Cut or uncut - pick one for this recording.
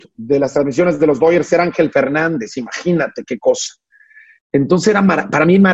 uncut